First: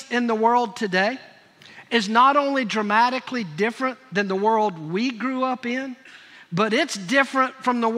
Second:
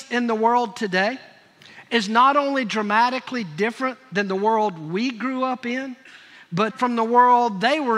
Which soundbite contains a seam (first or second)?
second